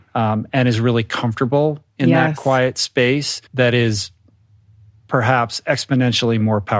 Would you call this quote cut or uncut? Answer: cut